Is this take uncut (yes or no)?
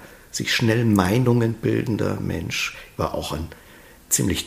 yes